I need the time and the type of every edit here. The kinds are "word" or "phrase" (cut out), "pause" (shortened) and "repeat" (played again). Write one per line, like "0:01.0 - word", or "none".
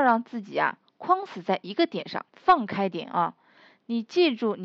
0:02.3 - pause